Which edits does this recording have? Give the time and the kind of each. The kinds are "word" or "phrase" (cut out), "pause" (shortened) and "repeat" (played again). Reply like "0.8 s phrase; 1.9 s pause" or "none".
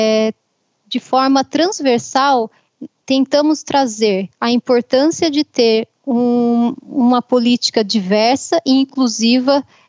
4.3 s pause